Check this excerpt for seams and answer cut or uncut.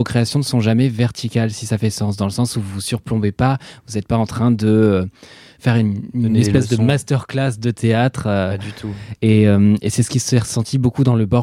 uncut